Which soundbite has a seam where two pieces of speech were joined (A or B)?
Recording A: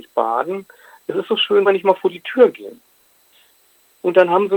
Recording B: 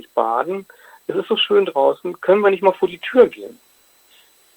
A